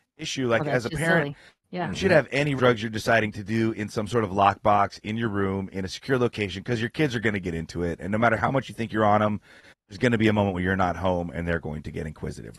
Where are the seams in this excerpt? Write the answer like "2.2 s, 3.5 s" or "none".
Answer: 2.6 s

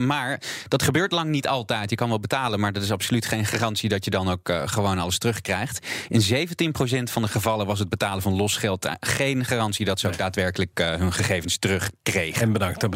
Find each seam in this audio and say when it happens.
none

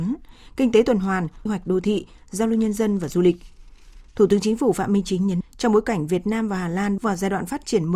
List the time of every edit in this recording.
1.5 s, 5.4 s, 7.0 s

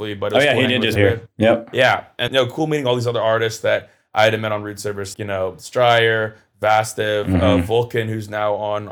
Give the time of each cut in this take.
1.0 s, 2.3 s, 5.1 s

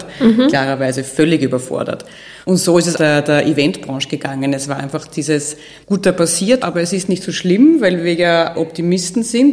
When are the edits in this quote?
2.4 s, 2.9 s, 6.6 s, 8.5 s

